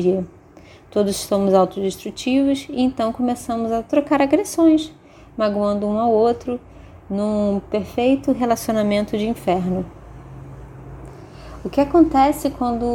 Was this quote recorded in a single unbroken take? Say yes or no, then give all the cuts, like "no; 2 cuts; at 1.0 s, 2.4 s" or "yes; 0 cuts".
yes; 0 cuts